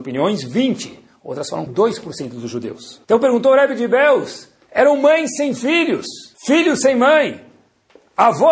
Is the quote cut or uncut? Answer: cut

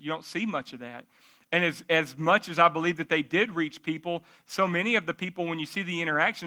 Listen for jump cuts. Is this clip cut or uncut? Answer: uncut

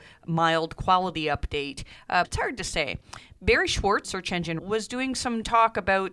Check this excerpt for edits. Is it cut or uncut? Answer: cut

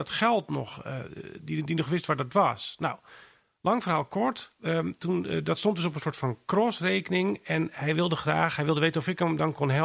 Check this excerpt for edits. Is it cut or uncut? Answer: uncut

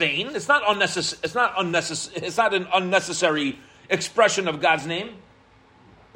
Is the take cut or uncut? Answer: uncut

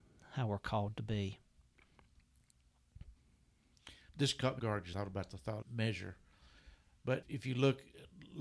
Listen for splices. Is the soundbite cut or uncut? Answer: cut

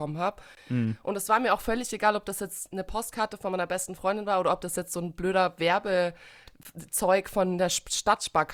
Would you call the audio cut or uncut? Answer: uncut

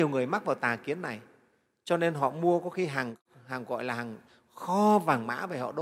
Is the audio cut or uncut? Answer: uncut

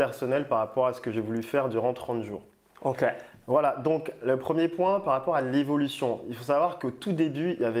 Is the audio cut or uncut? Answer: uncut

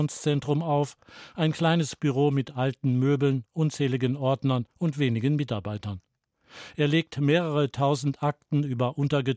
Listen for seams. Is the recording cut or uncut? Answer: cut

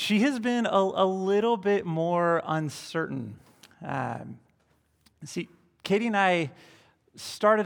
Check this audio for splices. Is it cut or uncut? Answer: uncut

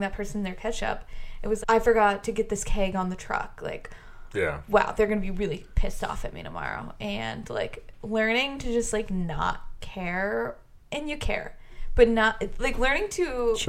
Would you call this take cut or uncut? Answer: cut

